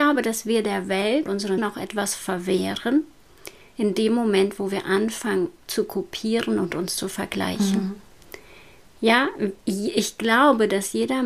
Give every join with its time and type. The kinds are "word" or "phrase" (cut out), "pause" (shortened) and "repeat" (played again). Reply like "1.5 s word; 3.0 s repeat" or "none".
1.3 s word; 1.6 s word; 5.6 s word